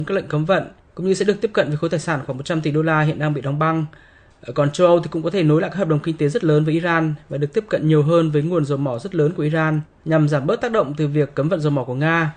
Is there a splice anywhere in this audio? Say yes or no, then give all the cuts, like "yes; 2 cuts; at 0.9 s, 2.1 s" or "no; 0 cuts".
no; 0 cuts